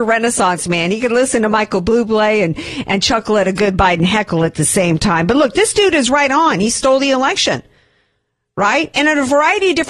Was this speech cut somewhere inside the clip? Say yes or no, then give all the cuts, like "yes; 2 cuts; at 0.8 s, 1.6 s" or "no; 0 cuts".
no; 0 cuts